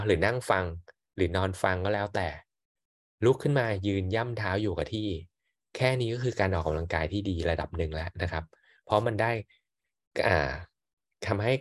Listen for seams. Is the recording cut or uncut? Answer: uncut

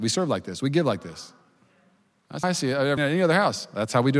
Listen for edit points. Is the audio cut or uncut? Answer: cut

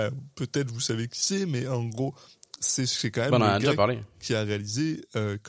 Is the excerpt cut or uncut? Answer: uncut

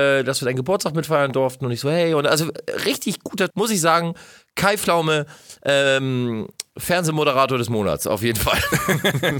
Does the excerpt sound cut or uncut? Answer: cut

